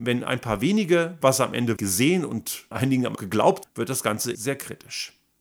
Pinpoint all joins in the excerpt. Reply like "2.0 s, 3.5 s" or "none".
1.2 s, 1.8 s, 2.7 s, 3.2 s, 3.6 s, 4.3 s